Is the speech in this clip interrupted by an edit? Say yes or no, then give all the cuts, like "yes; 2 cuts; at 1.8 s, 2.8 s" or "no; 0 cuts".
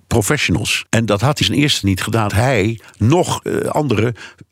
yes; 4 cuts; at 1.4 s, 1.8 s, 2.3 s, 3.4 s